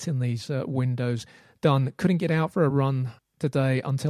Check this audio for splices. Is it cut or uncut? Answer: uncut